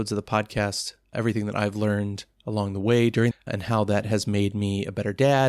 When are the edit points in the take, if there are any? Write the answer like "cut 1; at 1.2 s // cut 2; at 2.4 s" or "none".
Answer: cut 1; at 3.3 s

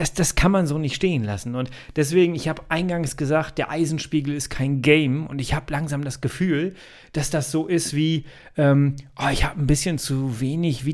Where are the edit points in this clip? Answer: none

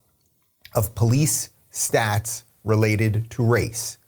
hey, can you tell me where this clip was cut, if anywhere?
none

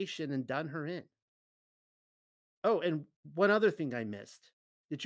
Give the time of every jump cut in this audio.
none

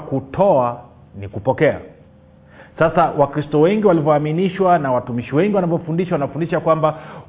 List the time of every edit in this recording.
cut 1; at 2.1 s

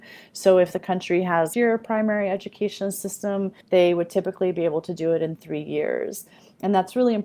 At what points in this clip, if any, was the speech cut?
cut 1; at 1.5 s // cut 2; at 3.6 s

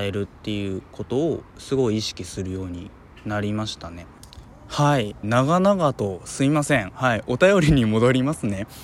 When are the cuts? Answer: cut 1; at 5.2 s

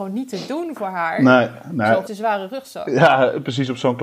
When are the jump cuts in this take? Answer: cut 1; at 2.1 s

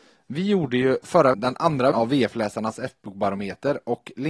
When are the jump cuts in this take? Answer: cut 1; at 1.3 s // cut 2; at 1.9 s

